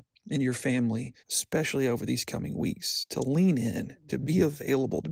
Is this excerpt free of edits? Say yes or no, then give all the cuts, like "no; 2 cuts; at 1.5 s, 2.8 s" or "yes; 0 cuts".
no; 1 cut; at 1.2 s